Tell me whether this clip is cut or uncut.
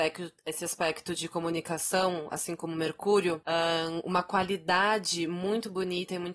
uncut